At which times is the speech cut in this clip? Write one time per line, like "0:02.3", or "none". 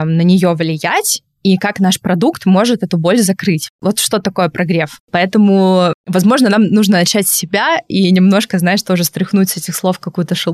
none